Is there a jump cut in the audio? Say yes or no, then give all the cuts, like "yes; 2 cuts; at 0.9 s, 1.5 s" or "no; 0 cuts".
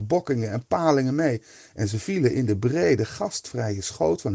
no; 0 cuts